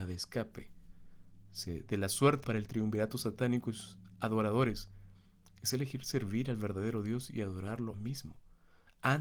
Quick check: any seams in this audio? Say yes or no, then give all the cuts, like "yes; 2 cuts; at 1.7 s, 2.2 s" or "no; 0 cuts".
yes; 2 cuts; at 2.4 s, 7.9 s